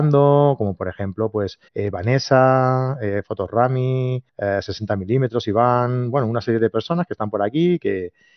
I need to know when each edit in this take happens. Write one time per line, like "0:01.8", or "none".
0:01.7
0:04.3